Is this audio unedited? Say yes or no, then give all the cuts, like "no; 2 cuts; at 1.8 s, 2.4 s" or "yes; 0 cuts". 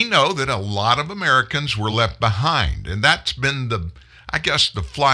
yes; 0 cuts